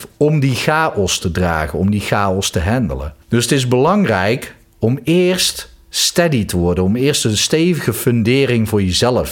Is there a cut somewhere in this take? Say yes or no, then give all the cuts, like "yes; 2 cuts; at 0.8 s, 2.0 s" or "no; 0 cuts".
yes; 1 cut; at 3.2 s